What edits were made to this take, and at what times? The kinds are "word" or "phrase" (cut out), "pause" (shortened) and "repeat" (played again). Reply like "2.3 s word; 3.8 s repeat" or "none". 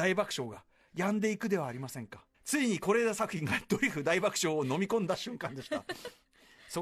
2.3 s pause